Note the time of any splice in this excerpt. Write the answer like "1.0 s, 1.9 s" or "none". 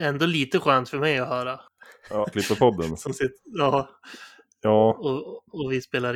2.3 s